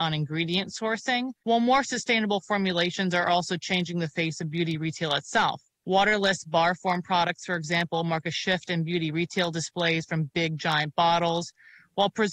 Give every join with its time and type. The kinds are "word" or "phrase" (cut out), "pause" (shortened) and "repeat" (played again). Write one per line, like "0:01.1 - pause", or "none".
0:01.4 - pause
0:05.7 - pause